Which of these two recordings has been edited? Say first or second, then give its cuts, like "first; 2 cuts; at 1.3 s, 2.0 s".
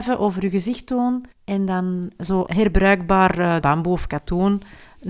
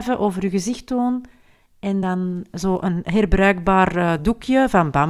first; 3 cuts; at 1.3 s, 2.5 s, 3.6 s